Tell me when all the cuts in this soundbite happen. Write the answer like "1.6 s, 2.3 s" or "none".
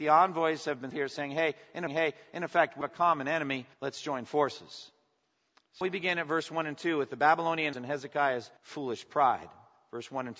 0.9 s, 1.9 s, 2.8 s, 3.7 s, 5.8 s, 7.7 s, 8.6 s